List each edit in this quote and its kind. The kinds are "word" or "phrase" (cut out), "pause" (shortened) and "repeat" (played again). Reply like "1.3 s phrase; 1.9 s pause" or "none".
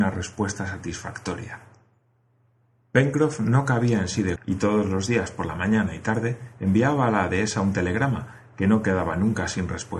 4.4 s word